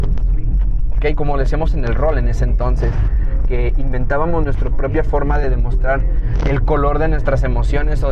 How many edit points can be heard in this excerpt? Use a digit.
0